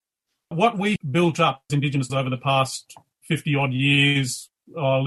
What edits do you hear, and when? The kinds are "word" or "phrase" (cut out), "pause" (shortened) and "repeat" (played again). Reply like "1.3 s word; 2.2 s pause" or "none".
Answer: 1.0 s word; 1.7 s word; 2.1 s word